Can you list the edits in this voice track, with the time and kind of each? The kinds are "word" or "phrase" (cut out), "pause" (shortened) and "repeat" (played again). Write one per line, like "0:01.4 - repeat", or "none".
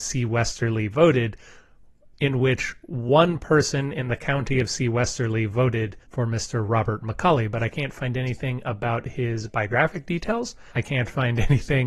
0:06.0 - pause
0:10.7 - pause